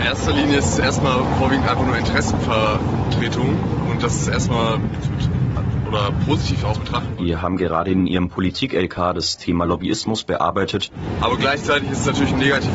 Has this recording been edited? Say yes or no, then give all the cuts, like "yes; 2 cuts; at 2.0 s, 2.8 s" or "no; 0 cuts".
yes; 2 cuts; at 5.0 s, 6.7 s